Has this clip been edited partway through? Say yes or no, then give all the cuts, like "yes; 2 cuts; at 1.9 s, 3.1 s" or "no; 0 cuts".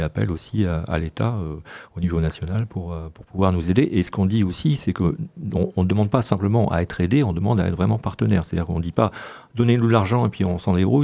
no; 0 cuts